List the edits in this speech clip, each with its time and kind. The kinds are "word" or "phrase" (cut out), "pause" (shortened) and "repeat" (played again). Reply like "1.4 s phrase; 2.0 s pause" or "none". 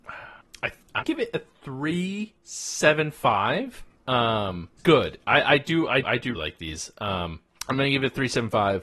1.0 s word; 4.8 s word; 6.0 s word; 6.3 s word